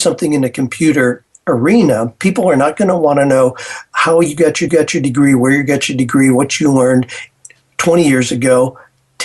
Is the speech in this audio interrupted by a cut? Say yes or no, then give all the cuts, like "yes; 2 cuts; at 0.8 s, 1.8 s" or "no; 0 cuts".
yes; 1 cut; at 4.7 s